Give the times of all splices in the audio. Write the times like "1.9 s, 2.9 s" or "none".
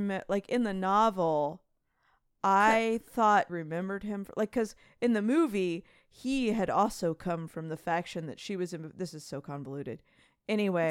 3.5 s